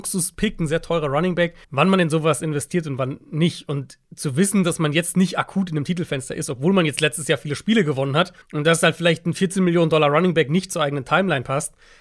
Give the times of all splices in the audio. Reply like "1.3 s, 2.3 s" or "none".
1.6 s, 4.0 s, 8.4 s